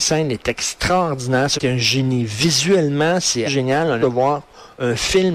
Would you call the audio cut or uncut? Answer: cut